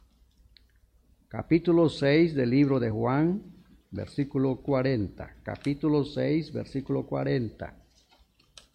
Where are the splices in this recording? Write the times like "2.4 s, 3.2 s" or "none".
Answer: none